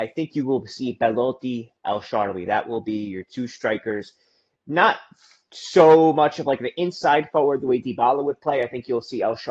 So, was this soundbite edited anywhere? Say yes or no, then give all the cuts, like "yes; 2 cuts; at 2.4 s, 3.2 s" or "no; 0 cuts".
no; 0 cuts